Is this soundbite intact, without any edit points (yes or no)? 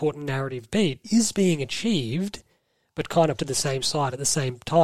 no